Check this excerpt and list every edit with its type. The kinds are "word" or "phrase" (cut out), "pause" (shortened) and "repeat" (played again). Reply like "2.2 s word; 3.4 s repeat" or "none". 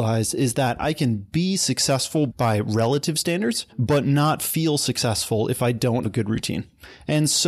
2.3 s word; 3.7 s pause; 6.0 s word